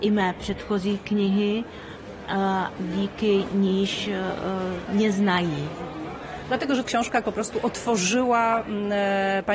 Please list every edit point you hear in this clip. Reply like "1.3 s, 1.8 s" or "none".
2.8 s, 4.9 s, 6.8 s, 7.2 s